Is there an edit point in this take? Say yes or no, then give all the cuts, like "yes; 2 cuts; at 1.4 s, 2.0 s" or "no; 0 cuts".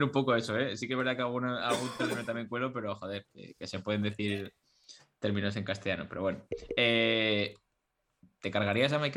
no; 0 cuts